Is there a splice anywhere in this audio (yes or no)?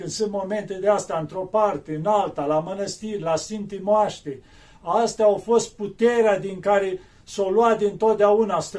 no